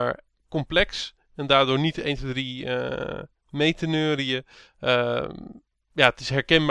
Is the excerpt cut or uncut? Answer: uncut